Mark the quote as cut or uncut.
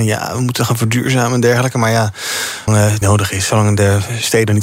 cut